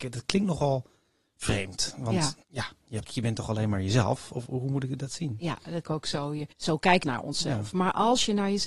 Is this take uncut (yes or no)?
no